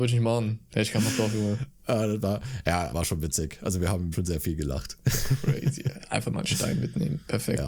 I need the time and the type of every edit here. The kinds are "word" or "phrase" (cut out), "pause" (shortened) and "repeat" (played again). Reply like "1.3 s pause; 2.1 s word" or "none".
2.9 s word; 4.1 s phrase